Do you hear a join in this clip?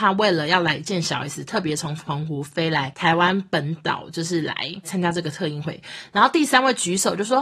no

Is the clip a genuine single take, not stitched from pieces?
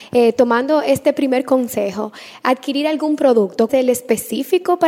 no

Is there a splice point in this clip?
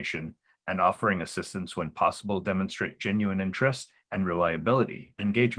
no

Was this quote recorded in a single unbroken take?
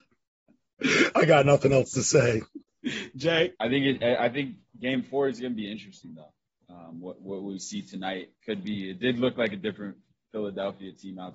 no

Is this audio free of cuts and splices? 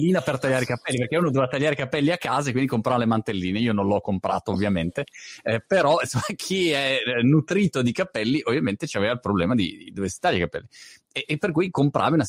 yes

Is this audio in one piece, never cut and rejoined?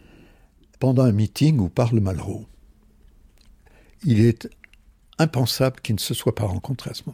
yes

